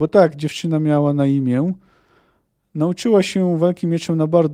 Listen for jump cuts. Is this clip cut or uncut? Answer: uncut